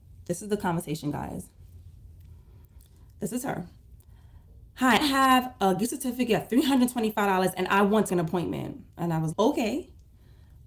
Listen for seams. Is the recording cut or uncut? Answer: cut